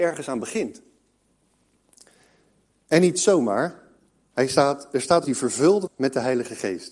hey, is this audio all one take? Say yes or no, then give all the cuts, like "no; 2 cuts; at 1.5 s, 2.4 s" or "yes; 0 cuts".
no; 2 cuts; at 5.2 s, 5.9 s